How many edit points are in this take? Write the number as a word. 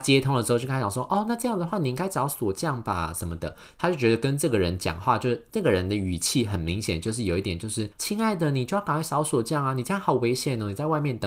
one